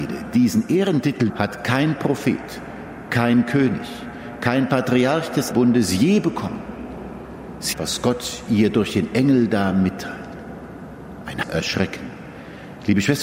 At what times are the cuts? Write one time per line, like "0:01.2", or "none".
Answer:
0:01.3
0:05.5
0:07.7
0:11.4